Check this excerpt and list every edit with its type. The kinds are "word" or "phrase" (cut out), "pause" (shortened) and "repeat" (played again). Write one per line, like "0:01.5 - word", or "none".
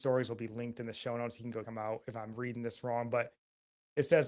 0:01.6 - word